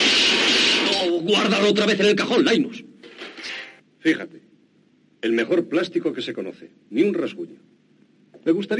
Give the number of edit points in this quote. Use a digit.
0